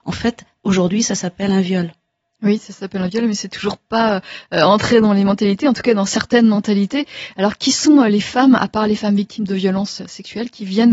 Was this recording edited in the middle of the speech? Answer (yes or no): no